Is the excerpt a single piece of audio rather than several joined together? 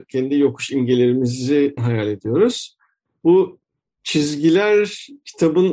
no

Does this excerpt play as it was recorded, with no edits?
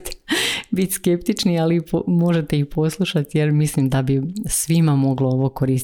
yes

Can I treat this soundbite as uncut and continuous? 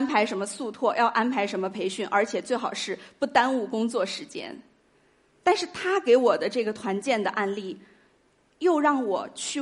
yes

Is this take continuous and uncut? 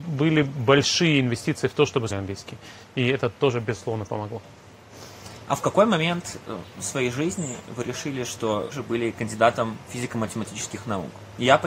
no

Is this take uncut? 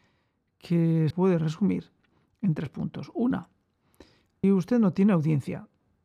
no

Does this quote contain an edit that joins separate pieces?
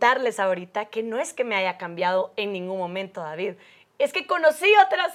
no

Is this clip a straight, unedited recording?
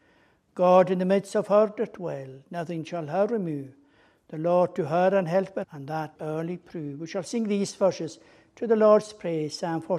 no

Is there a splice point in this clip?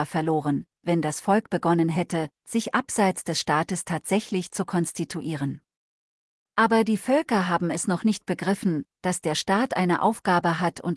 no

